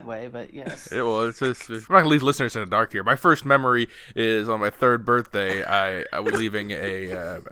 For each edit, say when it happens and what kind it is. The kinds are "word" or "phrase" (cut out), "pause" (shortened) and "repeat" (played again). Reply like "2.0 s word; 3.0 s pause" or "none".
1.9 s word; 6.3 s word